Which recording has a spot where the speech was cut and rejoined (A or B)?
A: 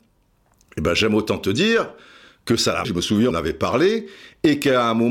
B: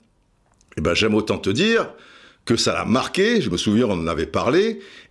A